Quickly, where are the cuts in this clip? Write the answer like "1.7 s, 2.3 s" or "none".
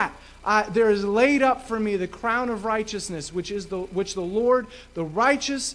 none